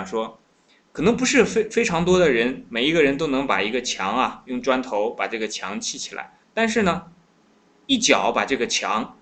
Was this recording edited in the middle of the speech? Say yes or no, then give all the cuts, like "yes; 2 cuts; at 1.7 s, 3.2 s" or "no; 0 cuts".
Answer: yes; 1 cut; at 6.4 s